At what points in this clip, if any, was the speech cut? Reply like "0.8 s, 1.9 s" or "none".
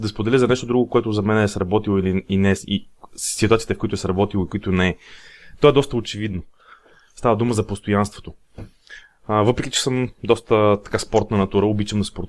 none